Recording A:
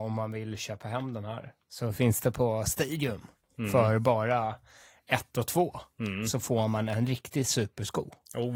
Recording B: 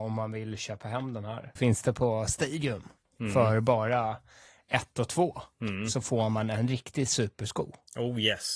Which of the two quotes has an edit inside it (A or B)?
B